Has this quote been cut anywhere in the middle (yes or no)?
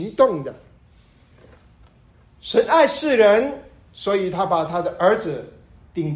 no